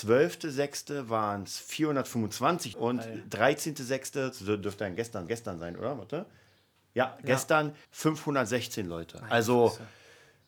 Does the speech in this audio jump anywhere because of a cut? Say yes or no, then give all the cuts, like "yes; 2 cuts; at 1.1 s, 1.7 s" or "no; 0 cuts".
yes; 3 cuts; at 2.7 s, 5.3 s, 7.8 s